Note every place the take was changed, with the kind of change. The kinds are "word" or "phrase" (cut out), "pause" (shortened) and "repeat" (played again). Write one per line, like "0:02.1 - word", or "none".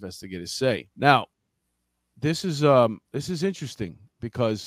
0:00.9 - pause
0:03.0 - pause

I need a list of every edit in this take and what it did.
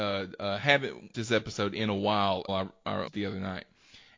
0:01.1 - word
0:02.5 - word
0:03.1 - word

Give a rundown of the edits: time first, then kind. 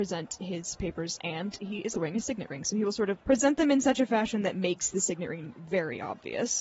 0:01.9 - word
0:03.2 - word

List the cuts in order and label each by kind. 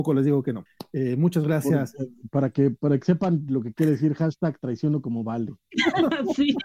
none

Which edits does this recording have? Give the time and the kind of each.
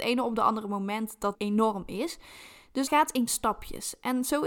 0:01.3 - word
0:02.9 - word
0:03.3 - word

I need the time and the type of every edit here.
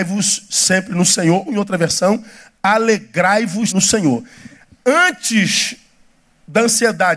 0:01.5 - word
0:03.7 - word

